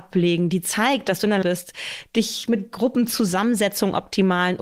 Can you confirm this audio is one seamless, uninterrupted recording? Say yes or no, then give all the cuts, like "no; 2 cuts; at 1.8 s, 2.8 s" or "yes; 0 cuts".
no; 1 cut; at 1.4 s